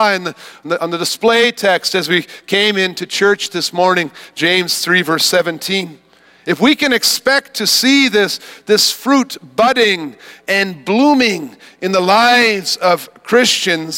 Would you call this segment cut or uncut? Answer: uncut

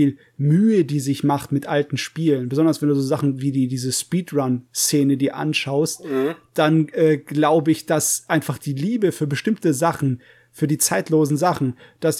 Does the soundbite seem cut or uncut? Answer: uncut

